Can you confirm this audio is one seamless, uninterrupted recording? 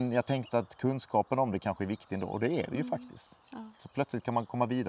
yes; 0 cuts

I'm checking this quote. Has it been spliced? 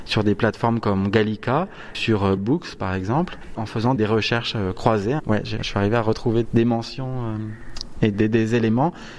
yes; 7 cuts; at 1.9 s, 2.4 s, 3.5 s, 4.0 s, 5.6 s, 6.4 s, 8.1 s

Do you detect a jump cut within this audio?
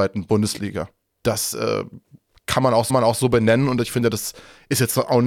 yes; 1 cut; at 2.9 s

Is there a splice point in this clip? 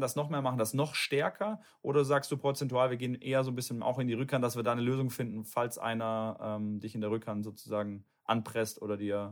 no; 0 cuts

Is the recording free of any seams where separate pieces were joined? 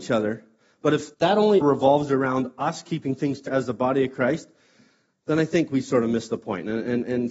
no; 3 cuts; at 1.1 s, 1.6 s, 3.5 s

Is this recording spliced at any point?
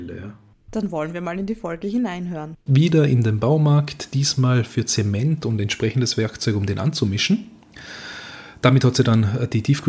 no; 0 cuts

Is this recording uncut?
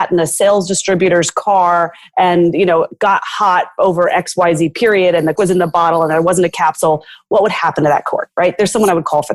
no; 1 cut; at 5.4 s

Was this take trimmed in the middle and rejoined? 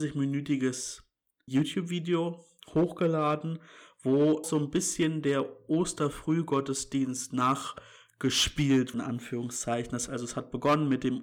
yes; 4 cuts; at 1.5 s, 4.4 s, 8.9 s, 10.1 s

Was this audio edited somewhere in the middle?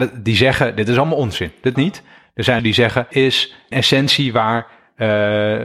yes; 4 cuts; at 1.7 s, 2.6 s, 3.1 s, 3.7 s

